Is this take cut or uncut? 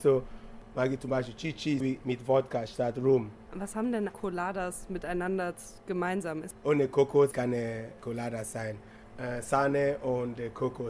cut